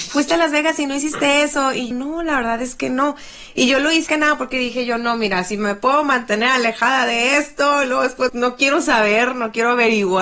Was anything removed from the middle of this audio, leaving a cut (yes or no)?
yes